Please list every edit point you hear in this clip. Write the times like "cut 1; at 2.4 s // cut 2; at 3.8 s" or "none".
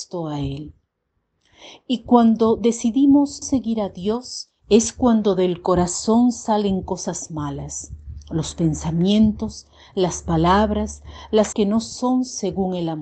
cut 1; at 3.4 s // cut 2; at 4.6 s // cut 3; at 11.5 s